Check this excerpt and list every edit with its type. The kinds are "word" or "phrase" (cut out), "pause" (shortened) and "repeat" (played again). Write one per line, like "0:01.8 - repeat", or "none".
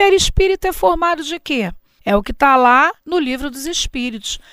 0:02.0 - pause
0:03.0 - pause